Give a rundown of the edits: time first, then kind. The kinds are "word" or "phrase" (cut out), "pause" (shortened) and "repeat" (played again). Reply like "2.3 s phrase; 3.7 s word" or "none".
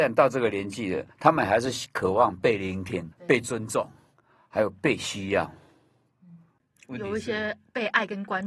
1.1 s pause; 3.1 s word

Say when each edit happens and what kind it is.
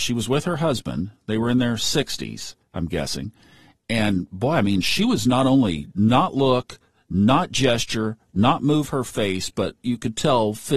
none

